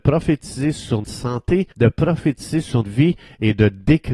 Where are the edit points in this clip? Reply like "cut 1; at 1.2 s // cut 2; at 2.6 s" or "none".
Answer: cut 1; at 1.0 s // cut 2; at 1.7 s // cut 3; at 2.8 s